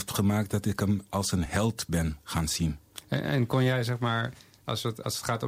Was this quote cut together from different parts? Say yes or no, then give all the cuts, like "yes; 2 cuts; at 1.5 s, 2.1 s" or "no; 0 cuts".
no; 0 cuts